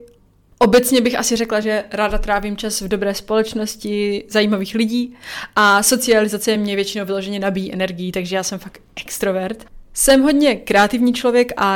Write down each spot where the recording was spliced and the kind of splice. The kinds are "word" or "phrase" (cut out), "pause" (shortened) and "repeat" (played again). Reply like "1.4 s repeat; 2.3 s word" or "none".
none